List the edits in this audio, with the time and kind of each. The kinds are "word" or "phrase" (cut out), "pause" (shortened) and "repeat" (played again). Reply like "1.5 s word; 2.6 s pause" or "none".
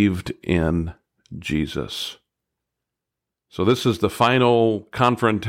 none